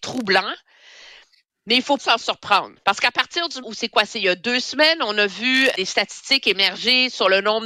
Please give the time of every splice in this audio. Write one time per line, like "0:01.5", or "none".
0:02.0
0:02.8
0:03.6
0:05.7